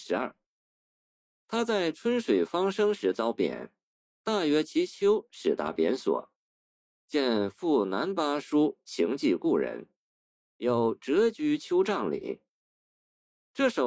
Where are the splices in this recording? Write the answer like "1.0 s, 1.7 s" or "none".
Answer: none